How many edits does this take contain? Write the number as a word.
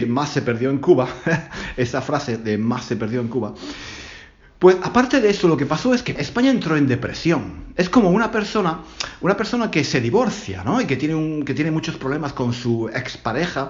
one